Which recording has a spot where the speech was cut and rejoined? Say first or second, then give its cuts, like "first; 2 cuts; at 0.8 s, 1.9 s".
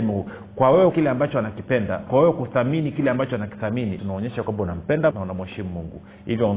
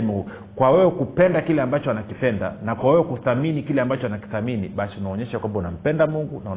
first; 4 cuts; at 0.9 s, 2.1 s, 4.0 s, 5.1 s